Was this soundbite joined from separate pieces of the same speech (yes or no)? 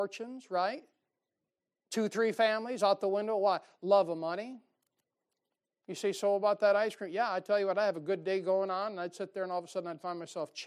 no